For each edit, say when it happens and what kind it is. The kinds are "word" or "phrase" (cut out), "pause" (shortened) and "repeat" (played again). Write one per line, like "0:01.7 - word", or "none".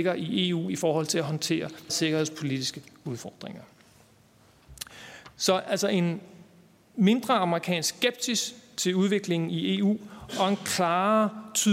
0:01.9 - word